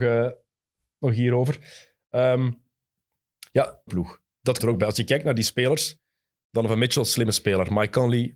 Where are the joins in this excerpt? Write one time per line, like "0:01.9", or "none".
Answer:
0:03.9
0:04.6